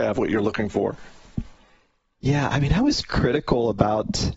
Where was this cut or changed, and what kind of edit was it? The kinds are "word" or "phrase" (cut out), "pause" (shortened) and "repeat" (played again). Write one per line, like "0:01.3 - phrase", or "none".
none